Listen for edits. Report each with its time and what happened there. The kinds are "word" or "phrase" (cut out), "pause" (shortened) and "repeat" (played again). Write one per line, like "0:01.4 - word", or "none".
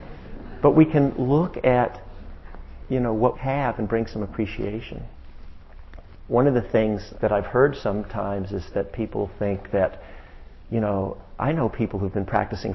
0:03.3 - word
0:07.1 - word